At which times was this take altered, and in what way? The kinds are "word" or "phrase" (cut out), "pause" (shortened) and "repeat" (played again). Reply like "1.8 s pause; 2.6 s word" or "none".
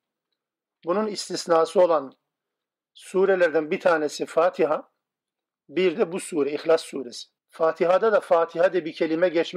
5.9 s word; 7.4 s pause

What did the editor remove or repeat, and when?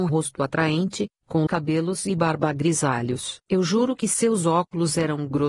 1.5 s word

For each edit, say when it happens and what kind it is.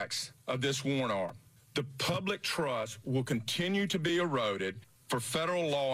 none

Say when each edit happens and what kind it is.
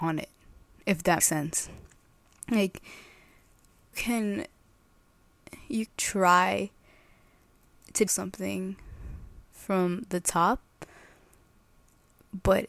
1.2 s word; 3.9 s word; 5.9 s word; 8.1 s word

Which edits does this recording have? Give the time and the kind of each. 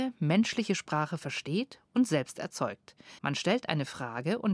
3.2 s pause

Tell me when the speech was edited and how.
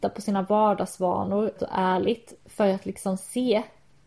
1.6 s word

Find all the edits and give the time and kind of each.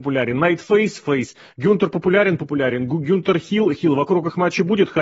none

